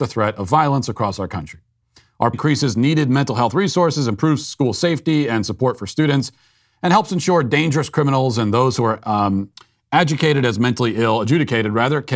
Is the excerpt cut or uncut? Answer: cut